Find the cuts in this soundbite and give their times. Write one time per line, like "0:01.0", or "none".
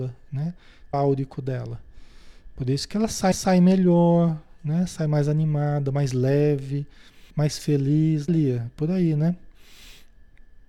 0:00.9
0:03.3
0:07.3
0:08.3

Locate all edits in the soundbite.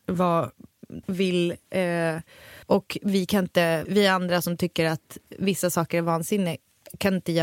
0:01.0
0:02.6
0:03.8

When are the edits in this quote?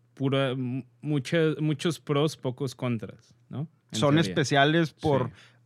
0:03.8

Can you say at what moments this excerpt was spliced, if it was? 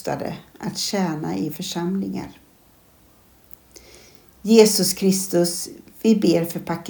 0:01.5

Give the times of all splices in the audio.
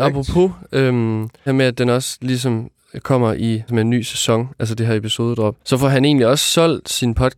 0:01.5
0:03.7
0:05.6

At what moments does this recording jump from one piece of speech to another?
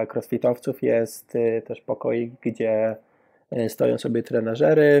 none

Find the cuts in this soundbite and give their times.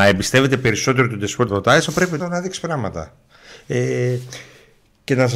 0:01.5
0:02.2

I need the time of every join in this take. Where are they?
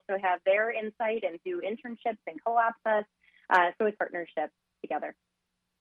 0:02.8
0:04.0

